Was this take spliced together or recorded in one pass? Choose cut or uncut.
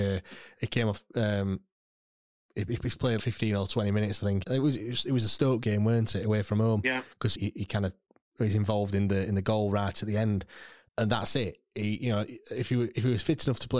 cut